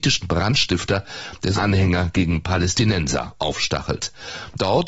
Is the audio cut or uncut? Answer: cut